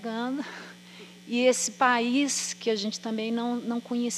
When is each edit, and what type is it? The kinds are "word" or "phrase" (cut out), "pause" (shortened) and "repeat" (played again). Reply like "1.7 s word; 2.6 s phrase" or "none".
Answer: none